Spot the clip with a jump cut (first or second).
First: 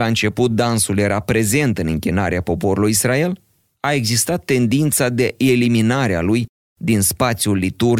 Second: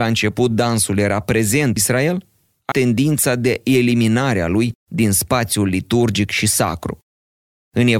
second